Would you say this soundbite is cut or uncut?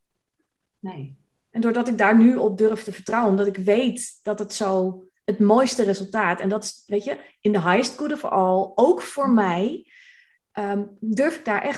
uncut